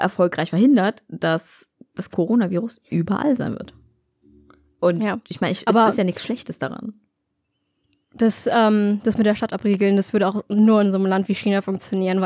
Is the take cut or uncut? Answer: uncut